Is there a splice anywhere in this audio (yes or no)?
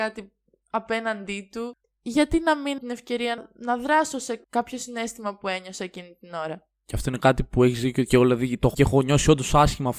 yes